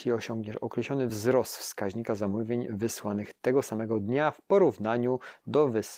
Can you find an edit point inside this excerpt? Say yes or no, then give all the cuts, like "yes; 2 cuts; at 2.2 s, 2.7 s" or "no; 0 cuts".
no; 0 cuts